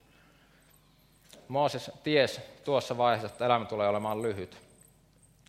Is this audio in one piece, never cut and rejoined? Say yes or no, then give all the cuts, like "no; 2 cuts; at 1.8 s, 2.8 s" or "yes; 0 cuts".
yes; 0 cuts